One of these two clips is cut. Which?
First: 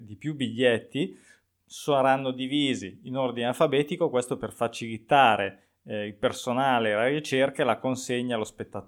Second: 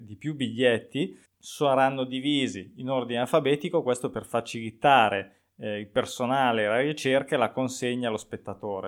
second; 1 cut; at 1.3 s

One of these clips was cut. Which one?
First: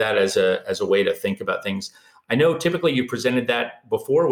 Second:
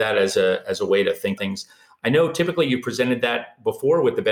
second; 1 cut; at 1.4 s

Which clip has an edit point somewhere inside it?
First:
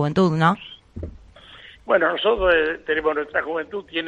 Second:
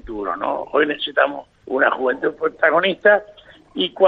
second; 1 cut; at 1.6 s

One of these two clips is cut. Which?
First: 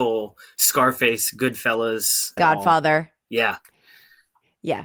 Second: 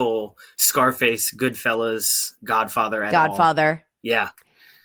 first; 1 cut; at 2.4 s

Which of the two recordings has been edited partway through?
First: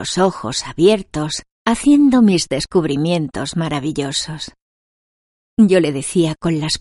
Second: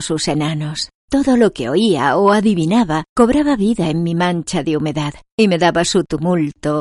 second; 1 cut; at 1.0 s

